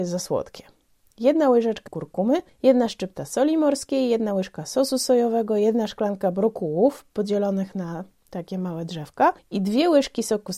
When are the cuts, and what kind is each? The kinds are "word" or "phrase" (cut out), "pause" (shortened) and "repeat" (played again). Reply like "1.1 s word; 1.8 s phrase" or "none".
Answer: 1.9 s word